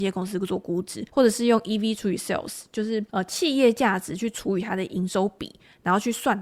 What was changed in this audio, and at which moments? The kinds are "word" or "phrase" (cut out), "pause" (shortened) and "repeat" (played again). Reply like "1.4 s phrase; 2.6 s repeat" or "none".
1.1 s pause; 3.1 s pause